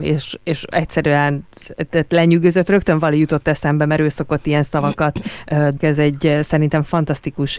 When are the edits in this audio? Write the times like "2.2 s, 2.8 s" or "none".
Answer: 5.8 s